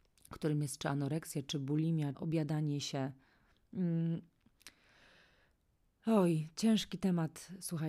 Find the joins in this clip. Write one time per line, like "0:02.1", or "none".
0:02.1